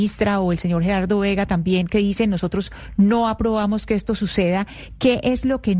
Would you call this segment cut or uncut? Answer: uncut